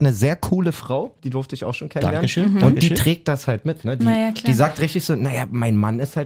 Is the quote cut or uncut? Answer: uncut